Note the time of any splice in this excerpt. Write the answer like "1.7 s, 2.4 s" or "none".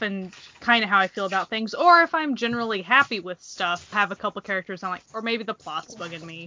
3.9 s, 5.1 s